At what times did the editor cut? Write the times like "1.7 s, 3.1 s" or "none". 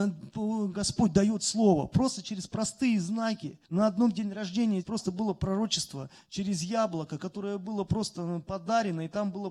3.6 s, 4.8 s